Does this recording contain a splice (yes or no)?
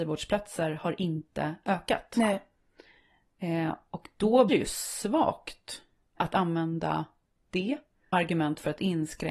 yes